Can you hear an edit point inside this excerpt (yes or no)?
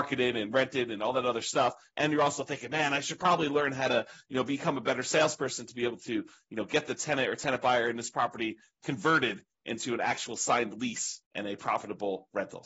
yes